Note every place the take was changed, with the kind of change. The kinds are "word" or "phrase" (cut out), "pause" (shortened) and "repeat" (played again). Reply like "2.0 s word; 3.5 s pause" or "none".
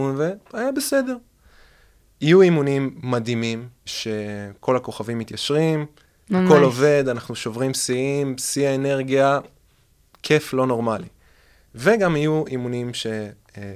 3.9 s word